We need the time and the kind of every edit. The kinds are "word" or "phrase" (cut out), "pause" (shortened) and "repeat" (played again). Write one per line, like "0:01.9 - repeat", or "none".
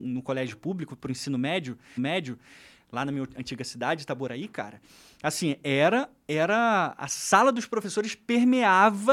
0:02.0 - repeat

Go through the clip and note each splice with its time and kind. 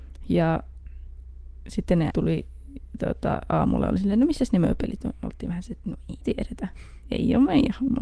0:02.1 - word
0:06.2 - word

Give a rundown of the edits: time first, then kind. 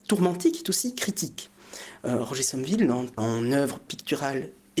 0:03.2 - phrase

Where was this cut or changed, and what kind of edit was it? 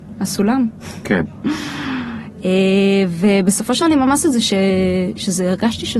0:03.8 - word
0:04.2 - word

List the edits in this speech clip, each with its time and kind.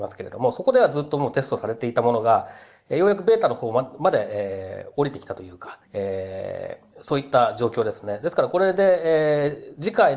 0:05.8 - pause
0:06.9 - pause

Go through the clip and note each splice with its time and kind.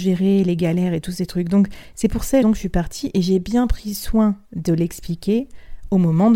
0:02.4 - word

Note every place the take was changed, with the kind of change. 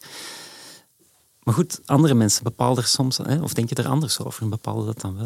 none

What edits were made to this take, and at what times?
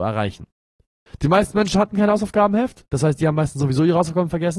none

